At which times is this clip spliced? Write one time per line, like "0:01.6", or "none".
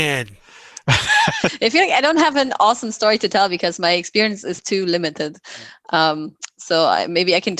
0:04.6